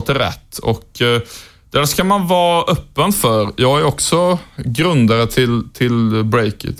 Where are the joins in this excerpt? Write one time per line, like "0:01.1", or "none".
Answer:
none